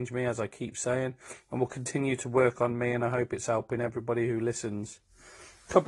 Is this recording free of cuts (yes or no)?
yes